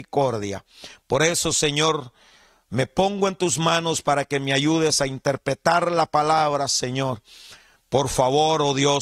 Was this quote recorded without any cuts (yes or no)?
yes